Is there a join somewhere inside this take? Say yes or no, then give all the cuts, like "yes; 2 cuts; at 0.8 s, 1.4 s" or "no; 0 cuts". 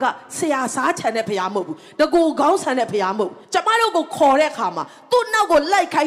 yes; 1 cut; at 3.4 s